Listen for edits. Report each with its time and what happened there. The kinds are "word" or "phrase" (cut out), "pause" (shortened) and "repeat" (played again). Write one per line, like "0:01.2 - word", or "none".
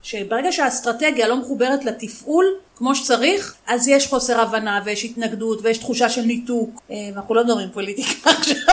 none